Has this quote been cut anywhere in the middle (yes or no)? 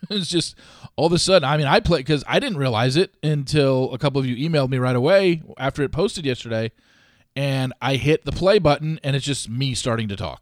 no